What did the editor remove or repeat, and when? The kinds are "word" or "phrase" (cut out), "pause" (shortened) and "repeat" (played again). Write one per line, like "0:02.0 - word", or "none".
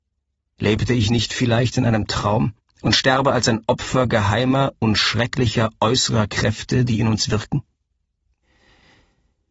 0:02.6 - pause